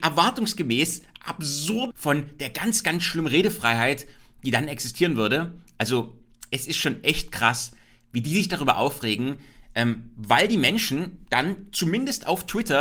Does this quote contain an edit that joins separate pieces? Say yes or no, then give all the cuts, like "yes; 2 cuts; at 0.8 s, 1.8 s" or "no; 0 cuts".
yes; 1 cut; at 1.9 s